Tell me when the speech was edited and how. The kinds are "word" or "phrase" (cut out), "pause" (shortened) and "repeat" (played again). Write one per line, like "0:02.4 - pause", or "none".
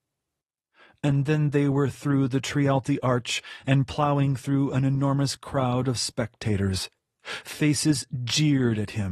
none